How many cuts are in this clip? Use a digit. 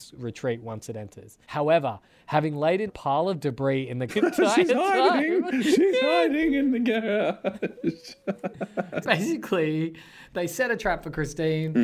4